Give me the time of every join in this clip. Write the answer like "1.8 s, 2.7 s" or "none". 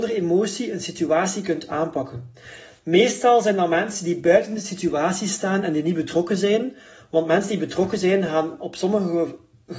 none